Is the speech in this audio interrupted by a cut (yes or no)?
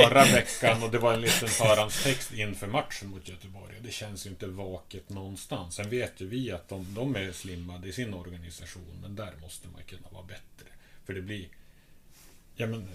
no